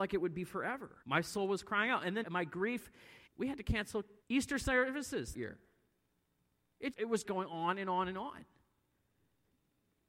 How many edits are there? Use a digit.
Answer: 7